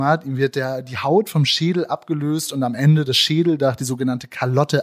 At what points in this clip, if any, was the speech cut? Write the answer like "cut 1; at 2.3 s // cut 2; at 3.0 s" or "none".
none